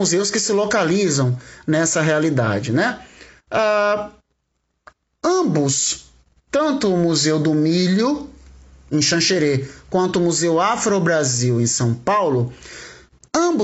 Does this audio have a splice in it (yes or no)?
no